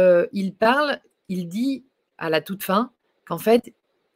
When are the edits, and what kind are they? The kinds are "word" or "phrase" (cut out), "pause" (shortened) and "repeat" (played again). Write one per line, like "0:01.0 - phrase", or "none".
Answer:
none